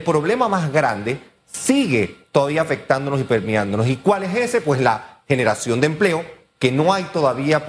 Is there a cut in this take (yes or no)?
no